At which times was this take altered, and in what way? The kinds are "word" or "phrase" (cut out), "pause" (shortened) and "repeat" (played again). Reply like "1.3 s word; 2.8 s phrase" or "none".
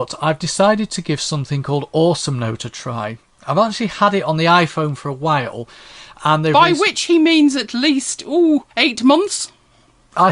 8.7 s pause